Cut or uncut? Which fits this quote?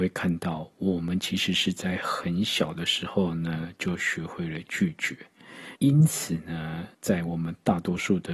cut